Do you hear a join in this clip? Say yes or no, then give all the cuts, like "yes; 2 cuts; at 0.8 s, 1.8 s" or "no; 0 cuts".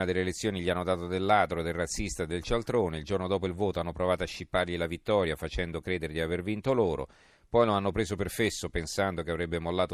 no; 0 cuts